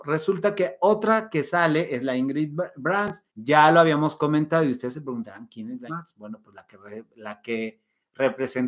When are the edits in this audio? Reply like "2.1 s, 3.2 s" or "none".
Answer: 3.3 s, 5.9 s